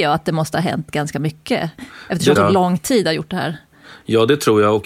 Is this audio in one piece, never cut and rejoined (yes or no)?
no